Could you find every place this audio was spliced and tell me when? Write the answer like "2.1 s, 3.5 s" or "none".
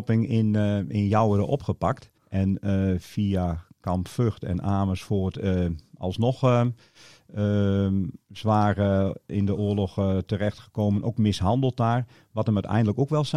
2.2 s